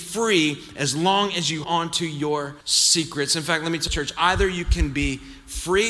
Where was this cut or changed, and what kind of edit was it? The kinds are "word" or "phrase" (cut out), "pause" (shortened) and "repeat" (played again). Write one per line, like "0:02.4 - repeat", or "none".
0:01.6 - word
0:02.6 - pause
0:03.9 - phrase